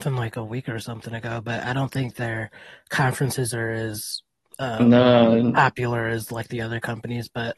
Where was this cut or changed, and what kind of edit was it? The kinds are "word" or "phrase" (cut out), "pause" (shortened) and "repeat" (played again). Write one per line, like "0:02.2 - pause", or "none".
none